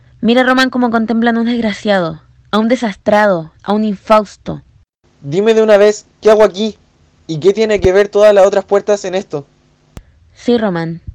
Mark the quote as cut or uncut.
uncut